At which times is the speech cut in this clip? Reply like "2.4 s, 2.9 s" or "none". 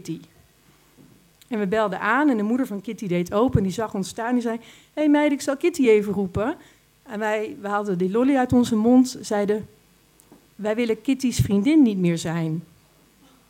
none